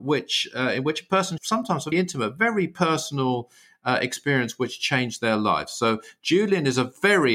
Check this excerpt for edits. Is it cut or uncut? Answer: cut